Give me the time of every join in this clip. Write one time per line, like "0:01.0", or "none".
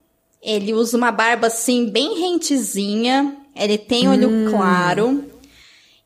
none